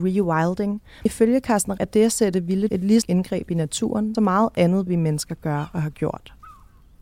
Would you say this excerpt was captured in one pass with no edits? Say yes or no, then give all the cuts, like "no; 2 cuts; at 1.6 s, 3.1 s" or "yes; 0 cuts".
no; 5 cuts; at 1.1 s, 1.8 s, 2.7 s, 3.0 s, 4.1 s